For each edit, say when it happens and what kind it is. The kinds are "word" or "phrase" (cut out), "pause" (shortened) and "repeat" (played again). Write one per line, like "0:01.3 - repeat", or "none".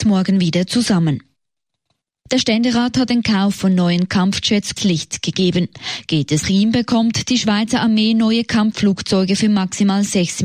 0:03.1 - word
0:04.8 - word
0:06.4 - word